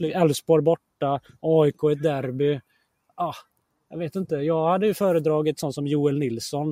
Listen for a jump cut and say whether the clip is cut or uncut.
uncut